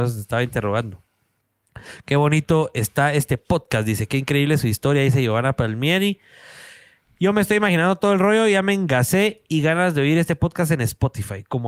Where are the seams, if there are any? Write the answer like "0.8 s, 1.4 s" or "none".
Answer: none